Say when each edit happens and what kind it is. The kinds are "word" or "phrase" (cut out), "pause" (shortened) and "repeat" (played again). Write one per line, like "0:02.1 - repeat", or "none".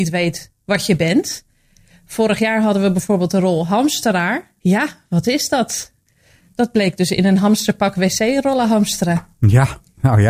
none